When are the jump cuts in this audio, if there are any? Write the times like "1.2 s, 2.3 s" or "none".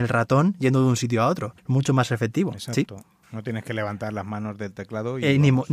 1.6 s, 3.2 s